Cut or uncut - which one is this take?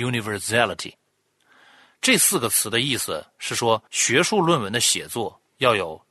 cut